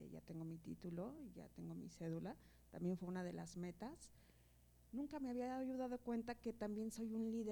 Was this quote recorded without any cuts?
yes; 0 cuts

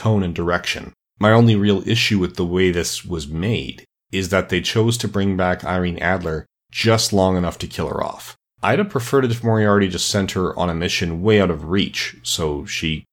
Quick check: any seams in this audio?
no; 0 cuts

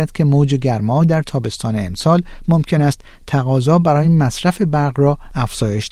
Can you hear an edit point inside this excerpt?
no; 0 cuts

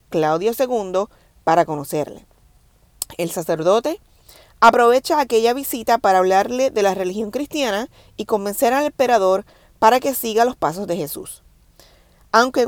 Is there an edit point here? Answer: no; 0 cuts

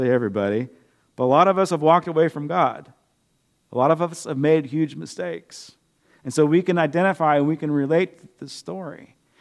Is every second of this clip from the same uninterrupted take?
yes; 0 cuts

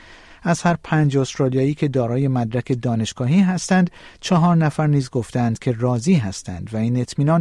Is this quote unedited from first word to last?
yes; 0 cuts

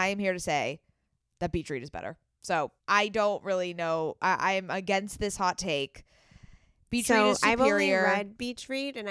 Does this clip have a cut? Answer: yes; 1 cut; at 2.8 s

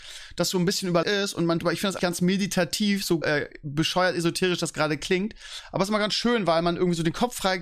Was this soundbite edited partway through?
yes; 4 cuts; at 1.0 s, 1.6 s, 2.0 s, 3.2 s

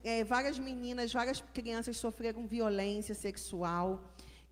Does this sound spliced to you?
no; 0 cuts

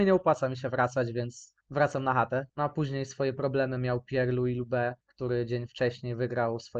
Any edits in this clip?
yes; 3 cuts; at 1.6 s, 2.5 s, 5.0 s

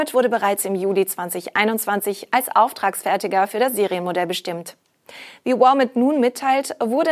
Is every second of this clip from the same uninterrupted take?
yes; 0 cuts

